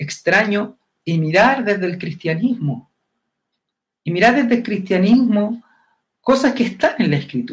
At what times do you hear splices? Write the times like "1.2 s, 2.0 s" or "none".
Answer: none